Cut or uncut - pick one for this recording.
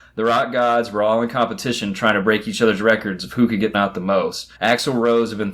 cut